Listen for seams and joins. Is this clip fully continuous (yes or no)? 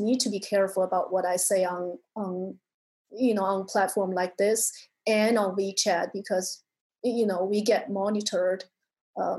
yes